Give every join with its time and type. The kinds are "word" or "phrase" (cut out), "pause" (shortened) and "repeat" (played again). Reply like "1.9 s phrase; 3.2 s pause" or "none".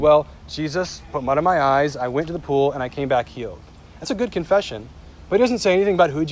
4.0 s word